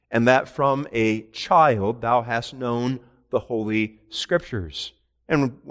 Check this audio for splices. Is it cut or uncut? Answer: uncut